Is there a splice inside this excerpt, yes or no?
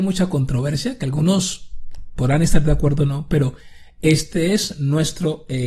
no